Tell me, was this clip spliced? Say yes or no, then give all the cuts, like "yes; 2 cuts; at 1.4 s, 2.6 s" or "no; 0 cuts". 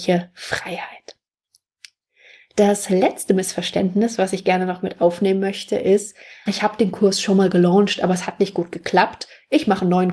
yes; 1 cut; at 6.5 s